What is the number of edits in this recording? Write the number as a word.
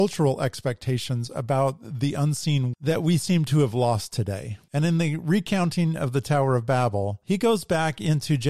one